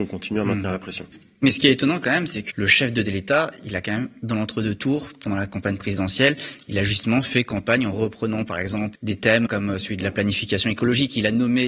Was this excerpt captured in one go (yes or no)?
no